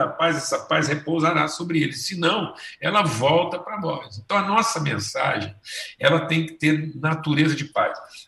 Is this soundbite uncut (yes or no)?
yes